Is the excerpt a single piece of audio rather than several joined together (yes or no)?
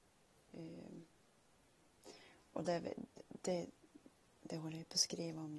yes